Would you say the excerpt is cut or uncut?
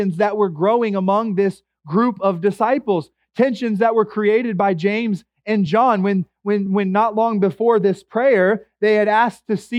uncut